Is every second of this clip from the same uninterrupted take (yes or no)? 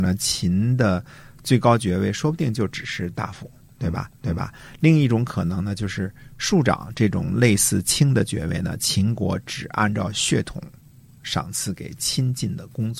no